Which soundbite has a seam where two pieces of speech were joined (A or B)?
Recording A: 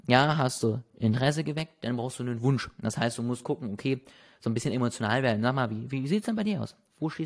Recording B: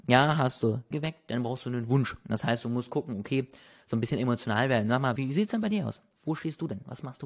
B